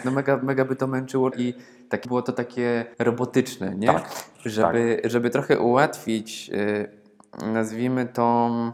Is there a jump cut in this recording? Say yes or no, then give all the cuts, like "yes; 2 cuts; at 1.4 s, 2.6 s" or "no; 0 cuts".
yes; 3 cuts; at 1.3 s, 2.0 s, 2.9 s